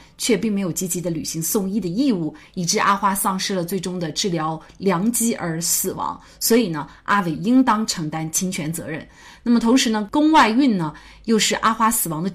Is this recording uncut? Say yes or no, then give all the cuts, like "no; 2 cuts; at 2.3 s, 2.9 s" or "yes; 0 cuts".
yes; 0 cuts